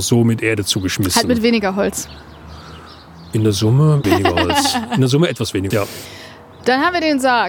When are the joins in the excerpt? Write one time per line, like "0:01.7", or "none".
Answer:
0:04.0
0:05.7